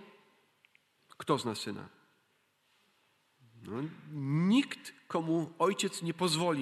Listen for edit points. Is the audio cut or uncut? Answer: uncut